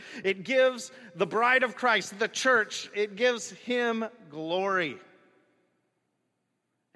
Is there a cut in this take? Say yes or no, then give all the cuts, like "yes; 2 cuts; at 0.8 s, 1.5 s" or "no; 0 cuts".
no; 0 cuts